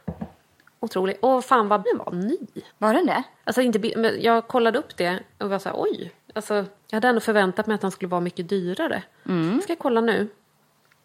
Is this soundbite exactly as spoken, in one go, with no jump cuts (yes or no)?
no